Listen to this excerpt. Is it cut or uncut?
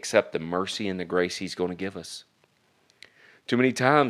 uncut